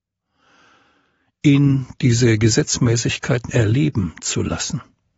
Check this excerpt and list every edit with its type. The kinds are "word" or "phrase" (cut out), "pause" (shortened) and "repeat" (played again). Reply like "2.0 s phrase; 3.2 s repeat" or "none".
3.5 s word